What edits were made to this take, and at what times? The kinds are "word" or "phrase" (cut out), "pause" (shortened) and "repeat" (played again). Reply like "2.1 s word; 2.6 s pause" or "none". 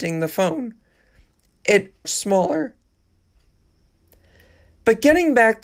2.0 s phrase

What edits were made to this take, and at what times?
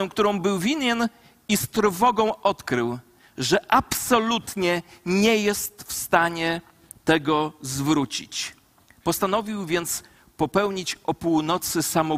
none

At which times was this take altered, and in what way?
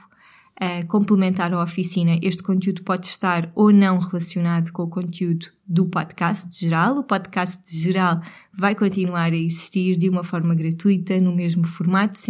4.7 s word

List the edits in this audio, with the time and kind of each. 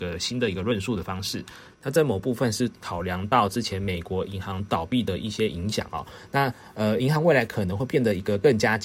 1.7 s pause

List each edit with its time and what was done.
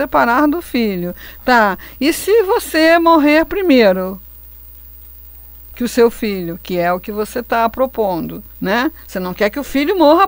8.5 s pause

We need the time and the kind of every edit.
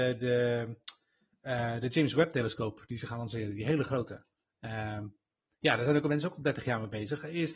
none

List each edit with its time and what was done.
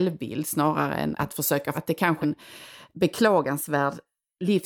1.1 s word; 1.7 s word; 2.2 s word

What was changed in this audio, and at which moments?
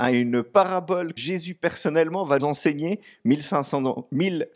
1.2 s word; 2.4 s word

